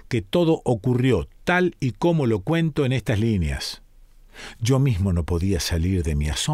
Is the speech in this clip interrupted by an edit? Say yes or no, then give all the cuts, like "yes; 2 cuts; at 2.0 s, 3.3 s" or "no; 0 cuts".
no; 0 cuts